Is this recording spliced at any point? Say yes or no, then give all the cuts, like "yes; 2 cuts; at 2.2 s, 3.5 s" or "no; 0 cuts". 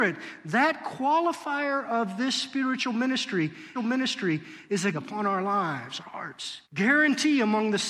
yes; 4 cuts; at 3.7 s, 4.9 s, 6.0 s, 6.6 s